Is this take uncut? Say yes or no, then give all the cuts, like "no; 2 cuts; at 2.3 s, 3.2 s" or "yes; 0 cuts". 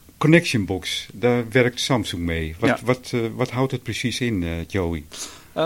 yes; 0 cuts